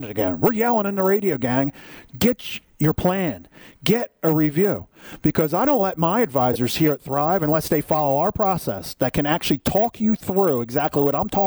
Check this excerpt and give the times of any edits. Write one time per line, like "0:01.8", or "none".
none